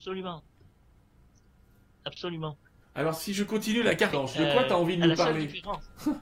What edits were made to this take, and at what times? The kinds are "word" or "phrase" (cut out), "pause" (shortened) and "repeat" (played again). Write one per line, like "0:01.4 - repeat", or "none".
0:02.8 - pause
0:04.1 - word